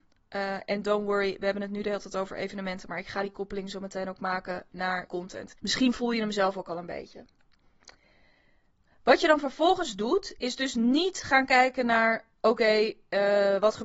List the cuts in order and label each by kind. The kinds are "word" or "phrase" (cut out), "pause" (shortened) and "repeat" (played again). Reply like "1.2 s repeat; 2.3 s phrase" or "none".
5.1 s phrase; 5.6 s pause; 8.7 s pause